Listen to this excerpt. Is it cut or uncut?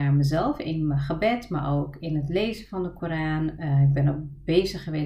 uncut